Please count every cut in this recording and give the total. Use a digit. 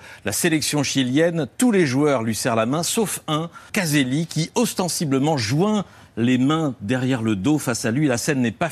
1